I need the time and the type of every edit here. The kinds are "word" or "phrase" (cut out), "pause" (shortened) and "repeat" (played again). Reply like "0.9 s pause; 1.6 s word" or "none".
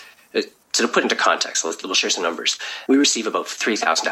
2.9 s word